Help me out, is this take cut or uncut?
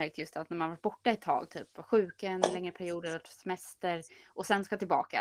uncut